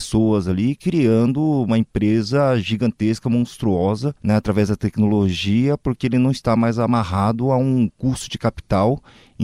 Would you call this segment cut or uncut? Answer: uncut